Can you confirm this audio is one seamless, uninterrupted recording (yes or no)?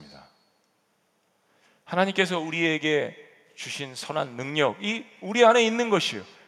yes